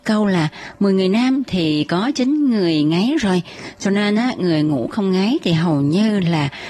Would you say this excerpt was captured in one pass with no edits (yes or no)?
yes